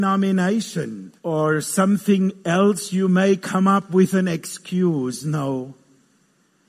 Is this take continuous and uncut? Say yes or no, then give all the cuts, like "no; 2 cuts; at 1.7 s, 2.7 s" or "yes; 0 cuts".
no; 1 cut; at 1.2 s